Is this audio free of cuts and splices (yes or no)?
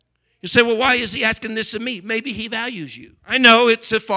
no